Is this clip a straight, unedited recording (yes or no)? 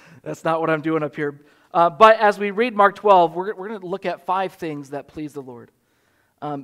yes